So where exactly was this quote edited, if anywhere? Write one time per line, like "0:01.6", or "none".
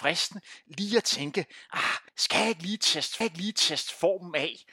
0:02.1
0:03.2